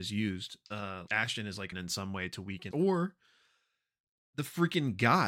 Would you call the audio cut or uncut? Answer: cut